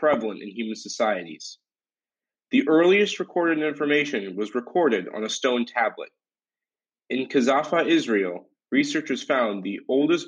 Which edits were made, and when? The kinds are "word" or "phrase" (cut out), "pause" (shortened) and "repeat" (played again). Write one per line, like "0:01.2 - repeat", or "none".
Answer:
none